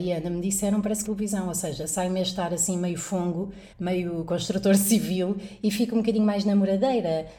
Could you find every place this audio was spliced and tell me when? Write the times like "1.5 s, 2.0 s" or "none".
1.0 s, 3.7 s